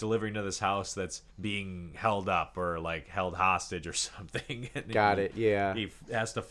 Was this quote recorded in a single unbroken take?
no; 1 cut; at 1.3 s

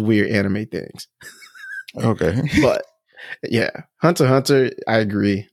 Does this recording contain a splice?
no; 0 cuts

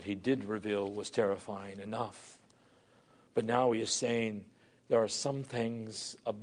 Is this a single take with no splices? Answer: yes; 0 cuts

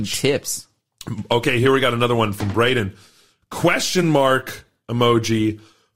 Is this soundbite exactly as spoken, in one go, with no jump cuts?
yes; 0 cuts

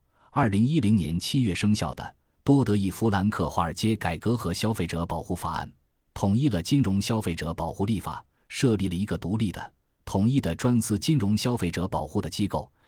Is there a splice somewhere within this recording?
no; 0 cuts

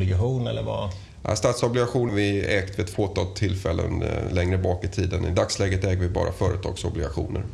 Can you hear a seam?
yes; 1 cut; at 2.1 s

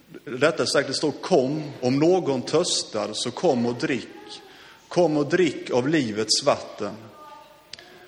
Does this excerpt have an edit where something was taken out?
no; 0 cuts

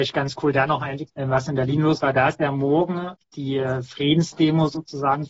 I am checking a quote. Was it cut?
yes; 2 cuts; at 1.1 s, 3.2 s

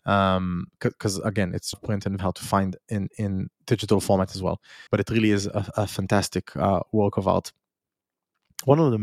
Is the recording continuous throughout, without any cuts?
no; 3 cuts; at 1.7 s, 2.2 s, 4.9 s

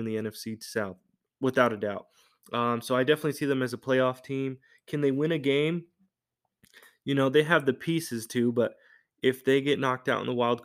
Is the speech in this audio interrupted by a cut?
no; 0 cuts

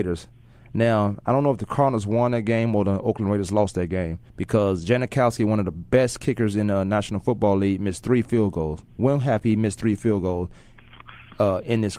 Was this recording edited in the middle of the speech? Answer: yes; 1 cut; at 4.3 s

